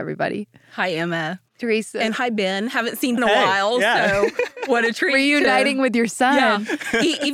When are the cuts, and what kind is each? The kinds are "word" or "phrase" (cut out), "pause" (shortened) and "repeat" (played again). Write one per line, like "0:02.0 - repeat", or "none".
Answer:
0:03.2 - phrase